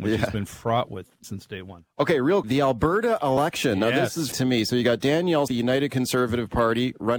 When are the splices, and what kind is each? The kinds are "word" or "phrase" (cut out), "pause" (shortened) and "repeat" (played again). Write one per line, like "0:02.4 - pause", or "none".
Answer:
0:01.2 - word
0:02.4 - word
0:04.3 - word
0:05.5 - word